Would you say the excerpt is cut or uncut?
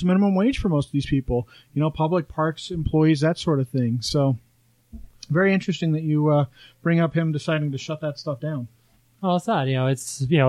uncut